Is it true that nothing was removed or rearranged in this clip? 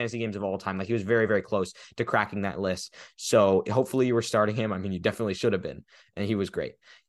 yes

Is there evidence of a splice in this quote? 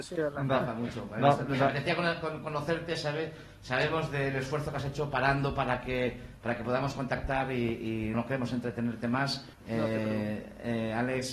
yes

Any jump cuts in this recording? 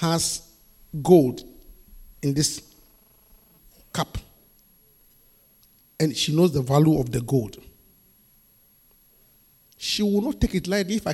no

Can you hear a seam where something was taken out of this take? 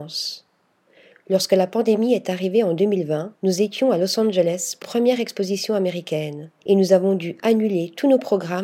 yes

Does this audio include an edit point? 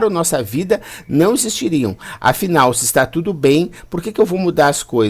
no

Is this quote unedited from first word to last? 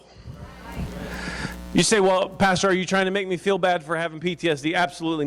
yes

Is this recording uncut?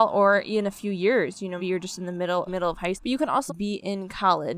no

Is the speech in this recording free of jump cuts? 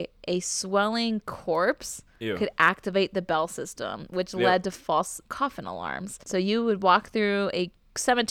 no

